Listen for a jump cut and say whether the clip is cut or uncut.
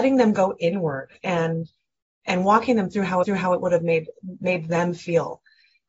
cut